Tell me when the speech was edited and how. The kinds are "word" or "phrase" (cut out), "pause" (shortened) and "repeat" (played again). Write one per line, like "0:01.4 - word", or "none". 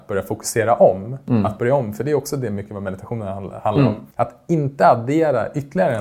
0:04.1 - pause